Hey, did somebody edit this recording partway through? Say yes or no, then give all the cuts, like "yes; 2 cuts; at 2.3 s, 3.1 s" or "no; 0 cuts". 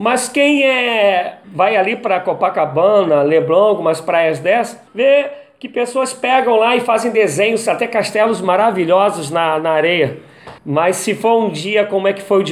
yes; 3 cuts; at 1.4 s, 4.9 s, 10.6 s